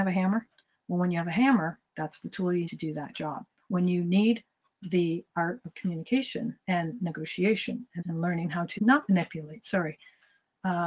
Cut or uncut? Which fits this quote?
cut